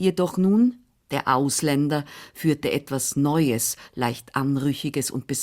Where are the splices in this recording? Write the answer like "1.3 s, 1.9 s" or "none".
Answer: none